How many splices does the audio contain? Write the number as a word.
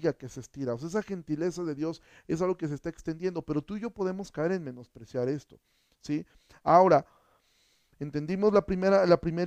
zero